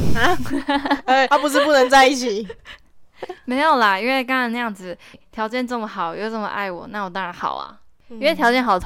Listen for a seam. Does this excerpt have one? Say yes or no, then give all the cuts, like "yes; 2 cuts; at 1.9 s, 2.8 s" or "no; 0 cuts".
yes; 2 cuts; at 1.3 s, 5.1 s